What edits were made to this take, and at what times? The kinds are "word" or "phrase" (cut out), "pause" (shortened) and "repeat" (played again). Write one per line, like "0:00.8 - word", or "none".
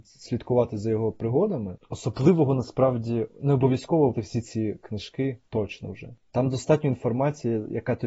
0:04.1 - word